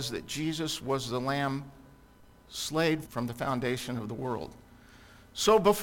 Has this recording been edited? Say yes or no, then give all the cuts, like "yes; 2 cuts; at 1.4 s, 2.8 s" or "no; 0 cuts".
yes; 1 cut; at 3.0 s